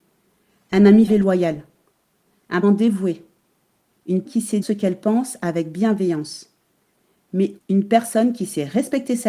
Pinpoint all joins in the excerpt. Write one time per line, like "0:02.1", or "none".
0:01.1
0:02.6
0:04.3
0:04.6
0:07.6